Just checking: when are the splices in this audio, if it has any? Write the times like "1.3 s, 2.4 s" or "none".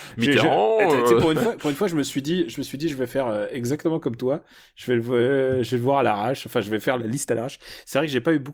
none